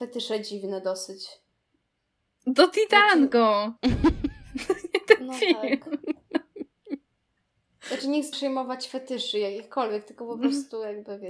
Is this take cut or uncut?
cut